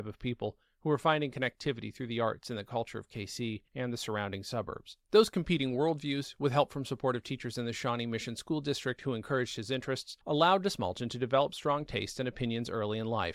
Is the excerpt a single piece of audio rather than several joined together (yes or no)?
no